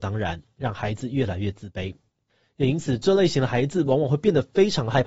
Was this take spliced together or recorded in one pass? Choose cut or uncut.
uncut